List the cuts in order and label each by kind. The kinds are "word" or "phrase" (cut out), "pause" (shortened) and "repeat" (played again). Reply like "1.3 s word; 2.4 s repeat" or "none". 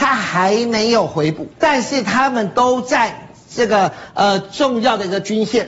1.5 s pause